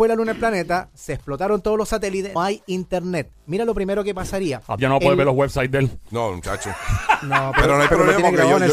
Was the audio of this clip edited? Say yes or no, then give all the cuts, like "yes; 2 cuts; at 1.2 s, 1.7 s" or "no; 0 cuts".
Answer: yes; 2 cuts; at 2.4 s, 4.8 s